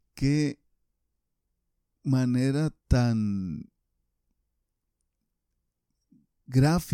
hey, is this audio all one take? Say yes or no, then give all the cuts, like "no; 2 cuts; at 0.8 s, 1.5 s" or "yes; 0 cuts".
no; 1 cut; at 2.8 s